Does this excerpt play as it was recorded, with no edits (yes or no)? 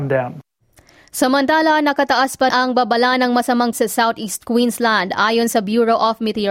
no